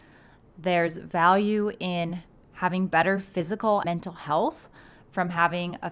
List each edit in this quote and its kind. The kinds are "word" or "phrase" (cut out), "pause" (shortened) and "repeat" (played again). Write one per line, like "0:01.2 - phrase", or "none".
0:03.8 - word